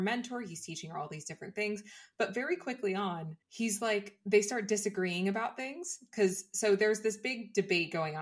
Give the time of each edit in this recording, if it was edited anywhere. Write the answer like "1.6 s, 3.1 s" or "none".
3.4 s